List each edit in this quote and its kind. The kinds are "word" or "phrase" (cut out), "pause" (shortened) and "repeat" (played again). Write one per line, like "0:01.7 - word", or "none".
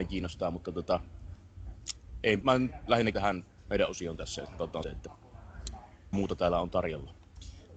0:02.4 - word
0:03.1 - word
0:03.6 - word
0:04.8 - word
0:06.1 - word